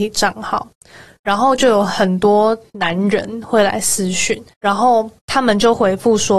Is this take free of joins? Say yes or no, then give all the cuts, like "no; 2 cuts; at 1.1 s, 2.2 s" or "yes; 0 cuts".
no; 1 cut; at 4.5 s